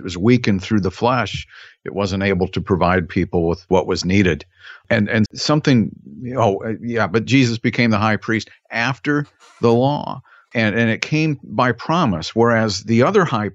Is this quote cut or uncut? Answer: cut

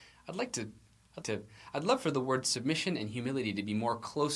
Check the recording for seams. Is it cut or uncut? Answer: cut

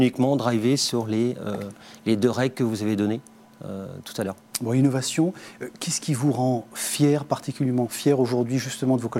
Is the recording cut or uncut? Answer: uncut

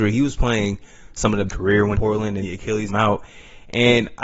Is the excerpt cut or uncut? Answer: cut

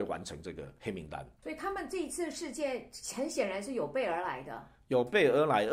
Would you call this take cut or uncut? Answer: cut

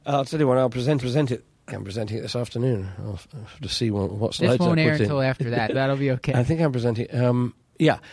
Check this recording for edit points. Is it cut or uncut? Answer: cut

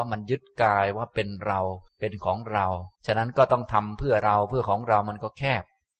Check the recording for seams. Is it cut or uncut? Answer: cut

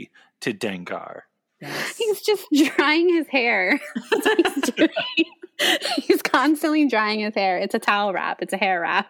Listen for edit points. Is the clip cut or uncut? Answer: uncut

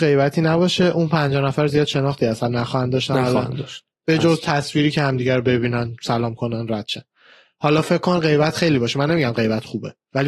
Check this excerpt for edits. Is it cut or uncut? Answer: uncut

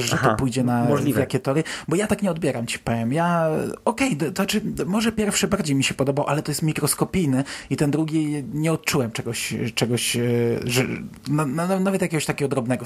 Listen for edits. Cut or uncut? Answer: uncut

